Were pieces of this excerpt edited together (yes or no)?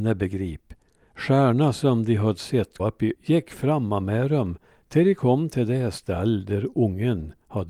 yes